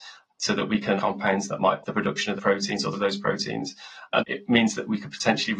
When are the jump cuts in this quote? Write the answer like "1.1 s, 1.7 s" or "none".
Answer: 1.0 s, 1.8 s, 2.4 s, 2.9 s, 4.2 s